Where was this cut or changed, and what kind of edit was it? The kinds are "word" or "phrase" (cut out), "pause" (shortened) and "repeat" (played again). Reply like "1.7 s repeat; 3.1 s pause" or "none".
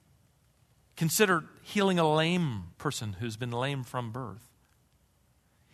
2.7 s pause